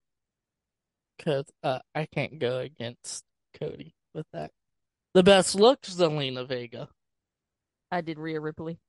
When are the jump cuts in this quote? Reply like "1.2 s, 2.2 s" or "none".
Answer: none